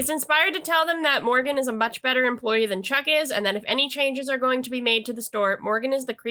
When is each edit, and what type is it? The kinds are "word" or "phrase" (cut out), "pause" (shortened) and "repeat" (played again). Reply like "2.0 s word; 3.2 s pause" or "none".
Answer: none